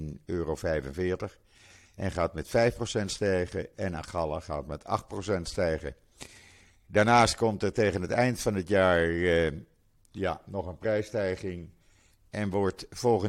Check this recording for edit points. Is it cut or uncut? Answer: uncut